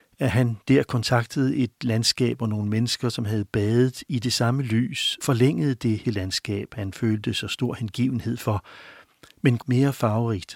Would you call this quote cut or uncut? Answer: cut